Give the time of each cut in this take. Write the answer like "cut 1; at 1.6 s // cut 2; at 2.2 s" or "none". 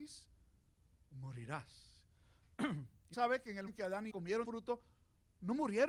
cut 1; at 3.1 s // cut 2; at 3.7 s // cut 3; at 4.1 s // cut 4; at 4.4 s